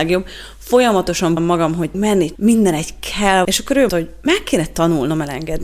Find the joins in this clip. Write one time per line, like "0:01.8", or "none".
0:01.4
0:01.9
0:02.4
0:03.4
0:03.9